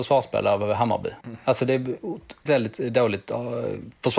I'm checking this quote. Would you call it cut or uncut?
cut